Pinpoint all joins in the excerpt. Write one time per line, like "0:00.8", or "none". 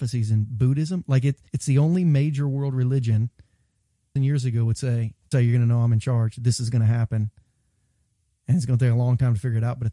0:01.5
0:04.2
0:05.3